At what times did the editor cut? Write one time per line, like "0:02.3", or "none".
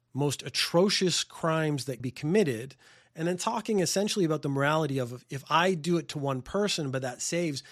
0:02.0